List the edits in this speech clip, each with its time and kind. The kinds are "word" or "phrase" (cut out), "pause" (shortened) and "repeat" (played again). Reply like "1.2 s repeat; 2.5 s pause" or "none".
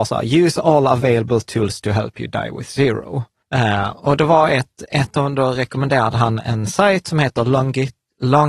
3.4 s pause